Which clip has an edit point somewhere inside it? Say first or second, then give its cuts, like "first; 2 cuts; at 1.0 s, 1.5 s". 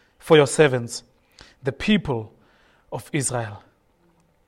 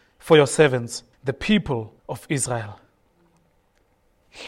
second; 2 cuts; at 1.1 s, 2.0 s